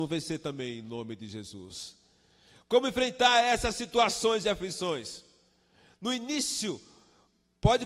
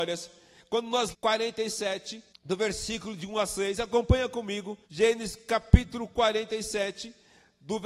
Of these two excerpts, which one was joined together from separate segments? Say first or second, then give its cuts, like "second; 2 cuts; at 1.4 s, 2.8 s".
second; 3 cuts; at 1.1 s, 2.3 s, 4.8 s